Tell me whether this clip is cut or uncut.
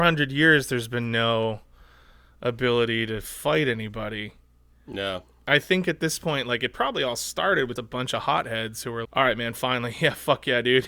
cut